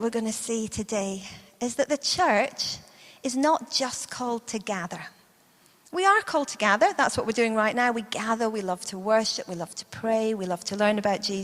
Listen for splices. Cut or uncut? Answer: uncut